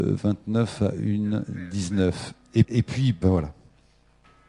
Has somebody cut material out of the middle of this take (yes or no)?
yes